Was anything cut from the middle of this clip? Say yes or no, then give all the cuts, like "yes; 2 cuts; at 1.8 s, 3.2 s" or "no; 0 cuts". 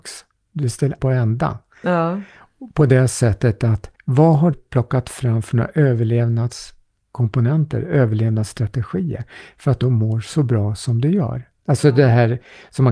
yes; 4 cuts; at 1.0 s, 4.0 s, 4.5 s, 9.8 s